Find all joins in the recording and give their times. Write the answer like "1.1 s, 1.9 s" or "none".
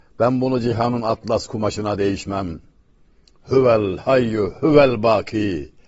none

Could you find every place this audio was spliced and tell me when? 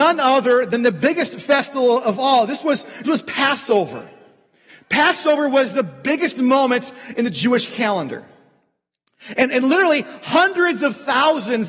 none

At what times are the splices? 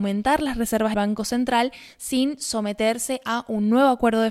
0.9 s

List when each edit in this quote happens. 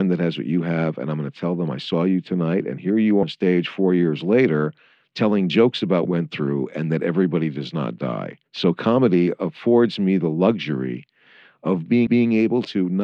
3.2 s, 6.0 s, 8.5 s, 12.1 s

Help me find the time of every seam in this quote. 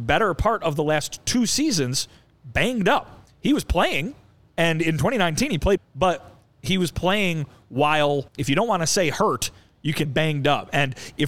5.8 s, 8.3 s, 10.0 s

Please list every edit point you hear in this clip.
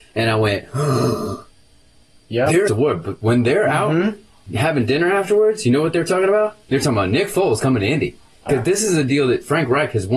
2.7 s, 6.6 s, 8.5 s

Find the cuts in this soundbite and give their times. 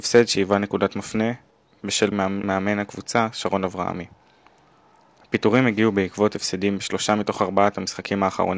2.1 s

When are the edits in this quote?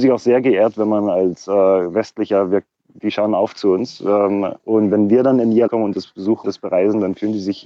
4.6 s, 5.7 s, 6.4 s

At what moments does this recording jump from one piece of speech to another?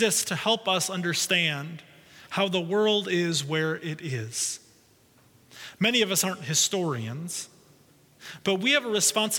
none

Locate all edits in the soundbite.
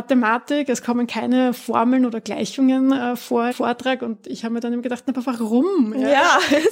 3.5 s

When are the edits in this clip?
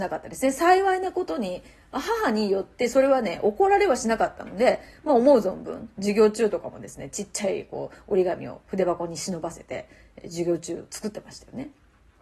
none

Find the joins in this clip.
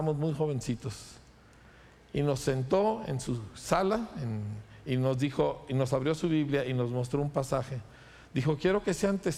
none

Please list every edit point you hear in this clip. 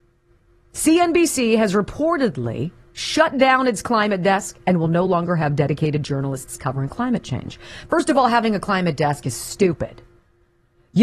none

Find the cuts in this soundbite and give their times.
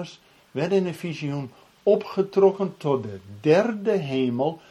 none

